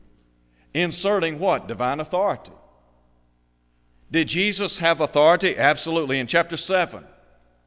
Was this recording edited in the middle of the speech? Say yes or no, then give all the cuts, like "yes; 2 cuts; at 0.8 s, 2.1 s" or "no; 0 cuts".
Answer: no; 0 cuts